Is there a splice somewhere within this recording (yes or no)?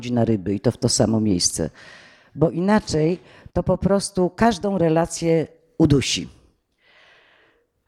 no